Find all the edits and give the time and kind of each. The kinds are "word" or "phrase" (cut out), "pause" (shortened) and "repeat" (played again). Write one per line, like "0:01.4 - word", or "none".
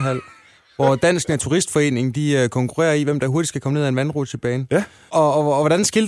none